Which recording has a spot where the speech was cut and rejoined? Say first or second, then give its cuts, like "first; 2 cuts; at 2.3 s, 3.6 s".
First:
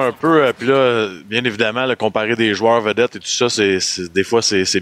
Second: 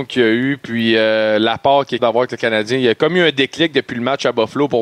second; 1 cut; at 2.0 s